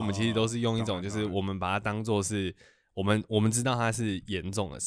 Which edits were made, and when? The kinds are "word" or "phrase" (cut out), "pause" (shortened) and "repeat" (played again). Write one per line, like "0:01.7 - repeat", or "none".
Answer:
none